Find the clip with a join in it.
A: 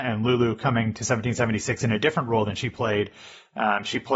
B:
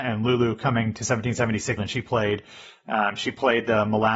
B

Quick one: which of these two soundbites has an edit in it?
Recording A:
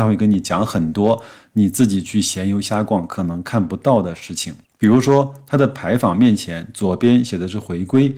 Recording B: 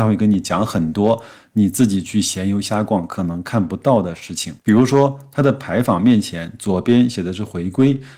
B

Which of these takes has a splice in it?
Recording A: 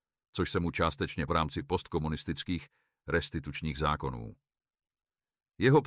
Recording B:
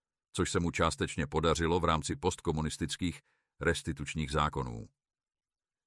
A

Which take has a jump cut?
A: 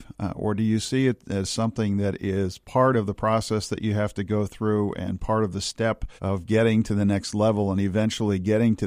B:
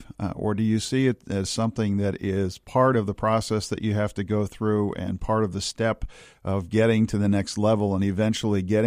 A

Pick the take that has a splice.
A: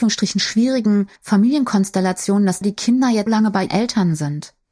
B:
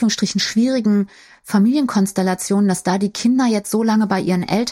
A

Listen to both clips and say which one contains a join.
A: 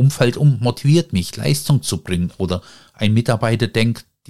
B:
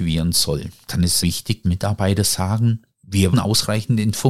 B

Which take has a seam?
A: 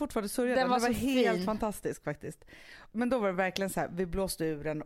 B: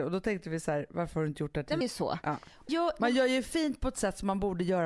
B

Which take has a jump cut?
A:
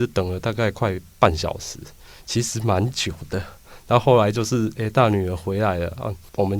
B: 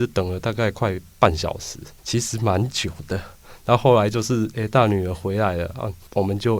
B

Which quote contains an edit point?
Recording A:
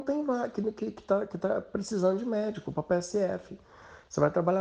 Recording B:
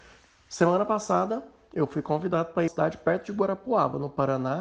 B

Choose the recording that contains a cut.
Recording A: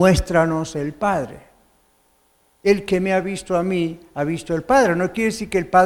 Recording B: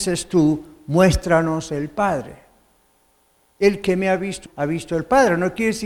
B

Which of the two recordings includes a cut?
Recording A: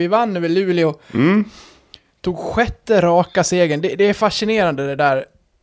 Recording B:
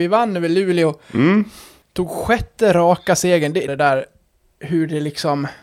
B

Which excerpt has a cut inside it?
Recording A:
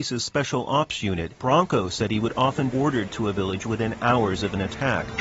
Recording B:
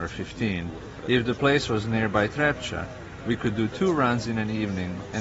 A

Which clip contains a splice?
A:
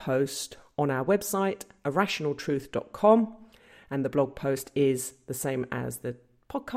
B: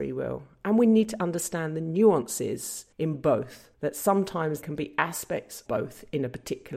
B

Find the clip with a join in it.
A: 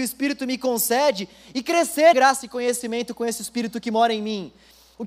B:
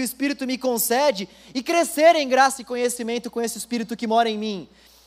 A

